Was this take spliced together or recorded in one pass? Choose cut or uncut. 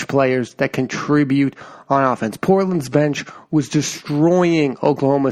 uncut